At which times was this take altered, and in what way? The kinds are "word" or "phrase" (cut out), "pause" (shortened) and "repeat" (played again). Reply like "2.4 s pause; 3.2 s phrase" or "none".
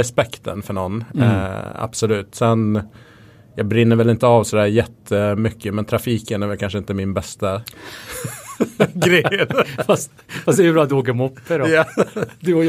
none